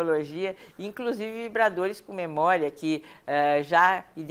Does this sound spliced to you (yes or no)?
no